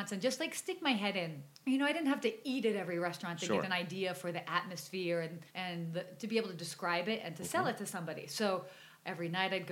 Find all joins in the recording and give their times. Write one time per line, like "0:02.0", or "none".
0:01.5
0:05.5